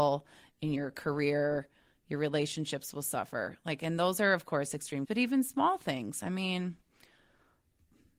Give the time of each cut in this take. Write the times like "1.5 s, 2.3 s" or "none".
5.1 s